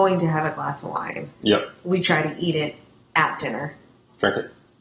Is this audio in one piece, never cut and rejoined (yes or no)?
yes